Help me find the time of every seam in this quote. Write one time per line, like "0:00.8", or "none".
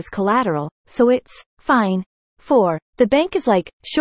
0:01.5
0:02.8